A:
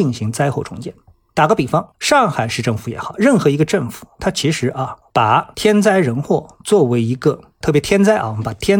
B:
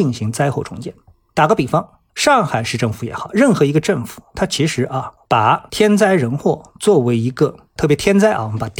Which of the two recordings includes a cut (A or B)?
A